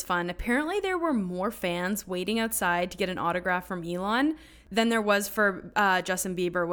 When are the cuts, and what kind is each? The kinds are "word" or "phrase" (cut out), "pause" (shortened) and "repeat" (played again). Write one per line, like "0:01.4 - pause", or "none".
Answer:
none